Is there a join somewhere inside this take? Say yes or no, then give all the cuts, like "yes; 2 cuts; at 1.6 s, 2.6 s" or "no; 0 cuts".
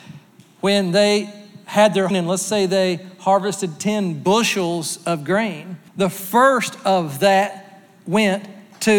yes; 2 cuts; at 2.1 s, 5.9 s